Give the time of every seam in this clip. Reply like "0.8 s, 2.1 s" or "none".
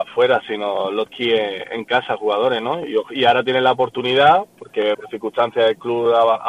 1.1 s, 4.9 s